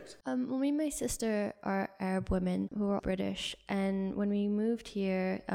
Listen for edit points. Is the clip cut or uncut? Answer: cut